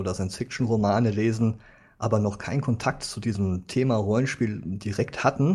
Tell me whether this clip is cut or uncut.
uncut